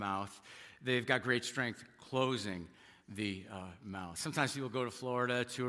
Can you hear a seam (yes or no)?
no